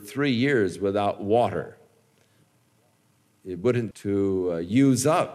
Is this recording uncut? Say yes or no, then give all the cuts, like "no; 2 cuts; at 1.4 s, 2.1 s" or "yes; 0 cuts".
no; 1 cut; at 3.9 s